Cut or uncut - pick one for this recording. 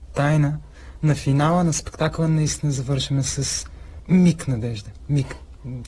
uncut